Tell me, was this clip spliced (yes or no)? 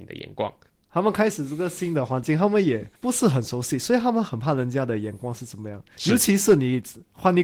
yes